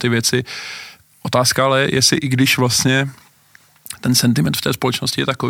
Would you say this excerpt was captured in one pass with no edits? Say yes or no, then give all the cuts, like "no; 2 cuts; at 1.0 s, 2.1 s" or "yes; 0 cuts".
yes; 0 cuts